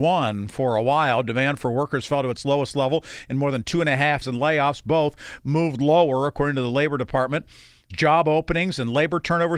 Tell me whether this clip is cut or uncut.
cut